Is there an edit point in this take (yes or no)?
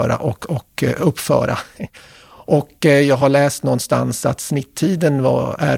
no